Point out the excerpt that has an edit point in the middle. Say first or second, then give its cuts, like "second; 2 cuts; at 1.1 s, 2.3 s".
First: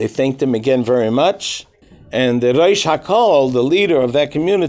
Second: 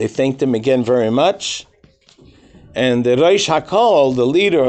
first; 1 cut; at 1.8 s